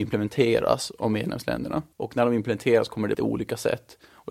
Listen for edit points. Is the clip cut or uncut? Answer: cut